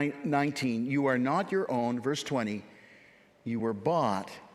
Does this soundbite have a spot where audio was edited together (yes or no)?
no